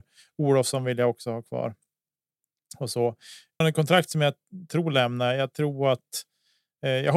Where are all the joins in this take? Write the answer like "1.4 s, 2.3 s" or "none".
3.6 s